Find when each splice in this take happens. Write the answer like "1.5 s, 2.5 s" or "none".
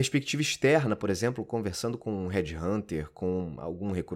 none